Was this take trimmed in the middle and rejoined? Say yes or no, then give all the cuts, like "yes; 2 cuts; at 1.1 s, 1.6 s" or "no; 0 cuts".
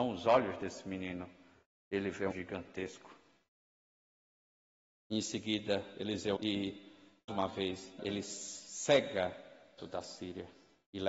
yes; 5 cuts; at 2.3 s, 6.4 s, 7.3 s, 8.0 s, 9.8 s